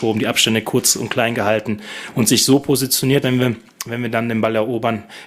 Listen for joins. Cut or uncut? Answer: cut